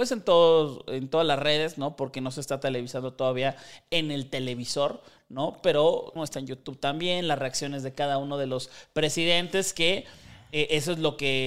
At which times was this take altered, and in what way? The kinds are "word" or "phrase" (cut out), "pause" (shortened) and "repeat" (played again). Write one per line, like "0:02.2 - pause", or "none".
0:06.2 - phrase